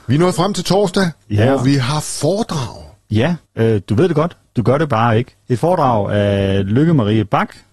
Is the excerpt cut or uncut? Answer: cut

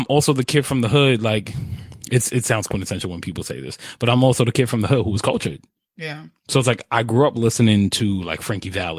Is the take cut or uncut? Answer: uncut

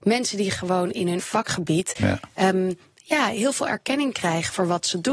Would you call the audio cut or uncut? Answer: cut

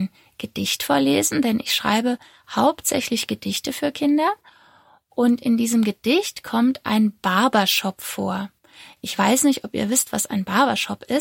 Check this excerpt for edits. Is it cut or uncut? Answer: uncut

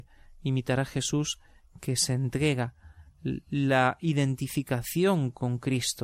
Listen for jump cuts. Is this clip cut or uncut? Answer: uncut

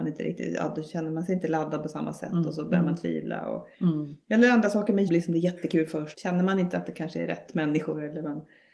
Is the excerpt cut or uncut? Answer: cut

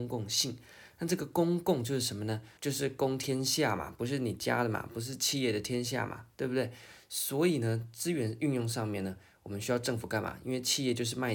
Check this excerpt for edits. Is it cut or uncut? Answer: cut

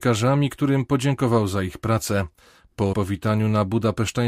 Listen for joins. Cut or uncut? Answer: cut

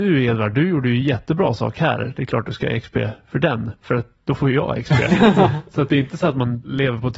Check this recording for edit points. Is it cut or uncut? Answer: uncut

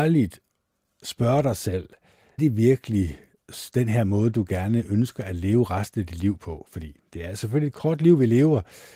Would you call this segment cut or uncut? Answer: cut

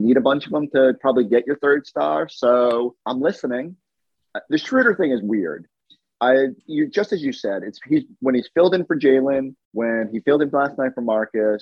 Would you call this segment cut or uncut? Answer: cut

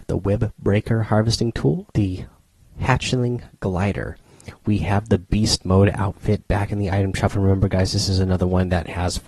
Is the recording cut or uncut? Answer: cut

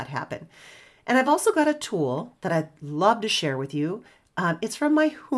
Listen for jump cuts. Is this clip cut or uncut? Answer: uncut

